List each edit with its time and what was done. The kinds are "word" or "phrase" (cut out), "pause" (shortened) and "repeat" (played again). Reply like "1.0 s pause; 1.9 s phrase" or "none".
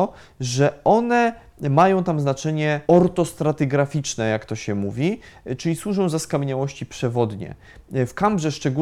2.8 s pause